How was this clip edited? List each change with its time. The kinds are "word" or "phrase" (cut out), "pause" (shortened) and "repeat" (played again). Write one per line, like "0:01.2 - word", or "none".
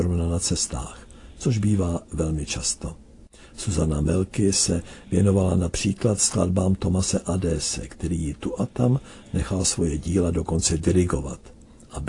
none